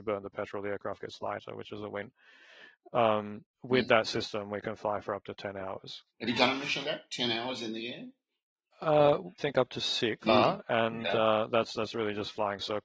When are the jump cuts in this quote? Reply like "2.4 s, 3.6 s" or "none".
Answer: 3.5 s, 6.8 s, 9.4 s, 10.2 s